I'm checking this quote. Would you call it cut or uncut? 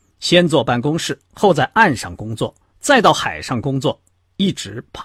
uncut